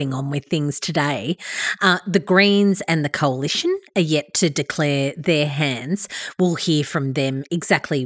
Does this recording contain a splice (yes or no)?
no